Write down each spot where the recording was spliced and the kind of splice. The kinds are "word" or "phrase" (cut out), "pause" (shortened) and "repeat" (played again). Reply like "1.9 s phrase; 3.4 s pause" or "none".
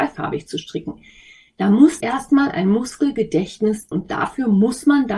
2.0 s word; 3.9 s word